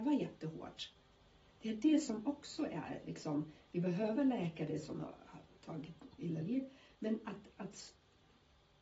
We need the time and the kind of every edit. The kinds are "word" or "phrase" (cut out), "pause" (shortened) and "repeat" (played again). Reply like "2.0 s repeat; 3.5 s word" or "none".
none